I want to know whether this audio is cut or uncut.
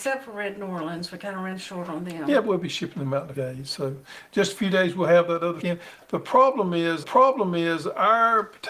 cut